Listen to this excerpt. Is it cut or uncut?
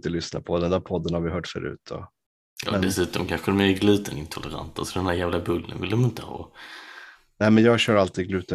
uncut